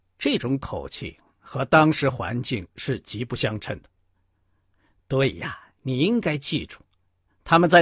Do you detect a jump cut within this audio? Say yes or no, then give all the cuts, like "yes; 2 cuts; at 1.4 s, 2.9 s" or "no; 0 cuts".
no; 0 cuts